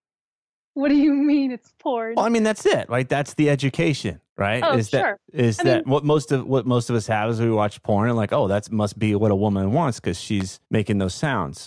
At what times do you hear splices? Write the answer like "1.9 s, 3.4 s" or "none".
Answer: 4.3 s, 10.6 s